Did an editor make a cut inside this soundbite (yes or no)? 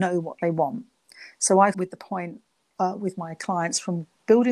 yes